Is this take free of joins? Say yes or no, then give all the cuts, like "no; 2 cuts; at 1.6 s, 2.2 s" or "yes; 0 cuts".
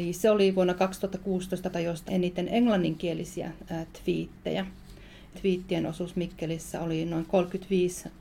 no; 3 cuts; at 1.7 s, 2.1 s, 5.3 s